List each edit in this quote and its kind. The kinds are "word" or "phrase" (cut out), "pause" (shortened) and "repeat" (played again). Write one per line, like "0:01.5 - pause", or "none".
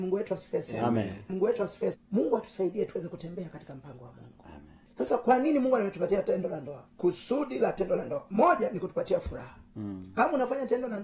0:01.3 - word
0:01.9 - word